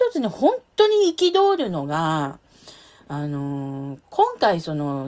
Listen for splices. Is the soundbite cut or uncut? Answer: uncut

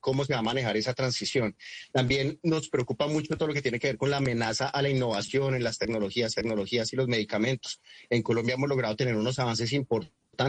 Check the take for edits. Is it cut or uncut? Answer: cut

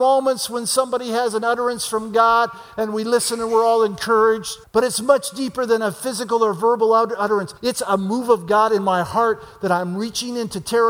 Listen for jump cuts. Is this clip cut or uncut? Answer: cut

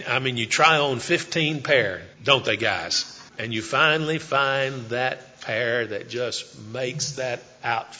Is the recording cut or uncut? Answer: cut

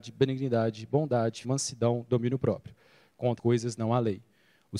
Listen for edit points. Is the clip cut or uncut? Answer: cut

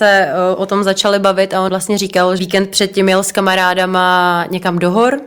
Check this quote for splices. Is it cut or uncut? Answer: cut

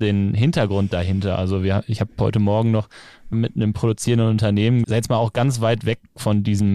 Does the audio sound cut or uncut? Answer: cut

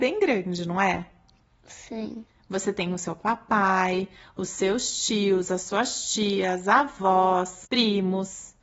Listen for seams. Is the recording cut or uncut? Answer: uncut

